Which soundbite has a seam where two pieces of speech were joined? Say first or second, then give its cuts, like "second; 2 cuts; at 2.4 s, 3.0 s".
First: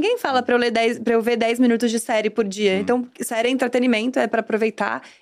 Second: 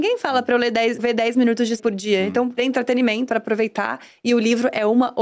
second; 4 cuts; at 1.0 s, 1.8 s, 2.6 s, 3.3 s